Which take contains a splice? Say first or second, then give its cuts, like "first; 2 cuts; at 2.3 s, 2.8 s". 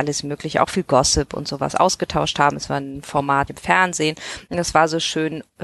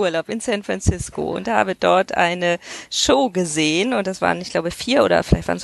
first; 1 cut; at 3.5 s